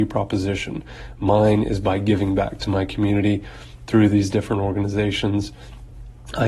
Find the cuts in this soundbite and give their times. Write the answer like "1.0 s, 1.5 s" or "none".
none